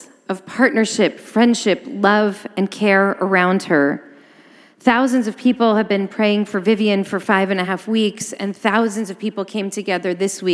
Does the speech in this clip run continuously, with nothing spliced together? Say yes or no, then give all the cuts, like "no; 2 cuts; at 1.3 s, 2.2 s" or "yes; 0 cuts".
yes; 0 cuts